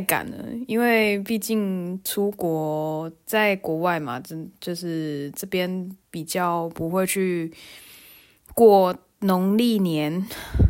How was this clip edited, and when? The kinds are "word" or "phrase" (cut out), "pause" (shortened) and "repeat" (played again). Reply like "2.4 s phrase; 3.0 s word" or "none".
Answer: 6.0 s pause